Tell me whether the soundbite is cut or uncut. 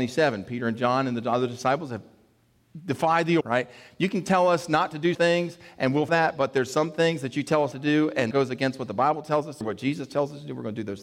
cut